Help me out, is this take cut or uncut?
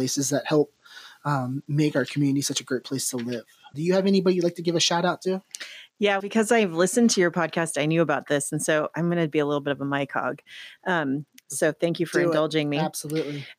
cut